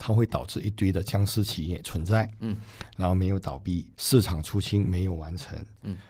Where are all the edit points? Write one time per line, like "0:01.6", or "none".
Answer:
0:03.9